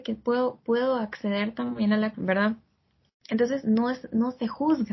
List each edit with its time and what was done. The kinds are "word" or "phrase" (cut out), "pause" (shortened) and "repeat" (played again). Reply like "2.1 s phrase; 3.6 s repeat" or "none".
2.1 s word